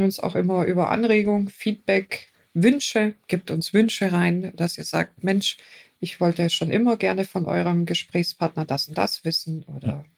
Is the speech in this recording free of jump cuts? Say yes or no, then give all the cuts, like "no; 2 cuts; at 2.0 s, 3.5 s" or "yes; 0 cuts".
yes; 0 cuts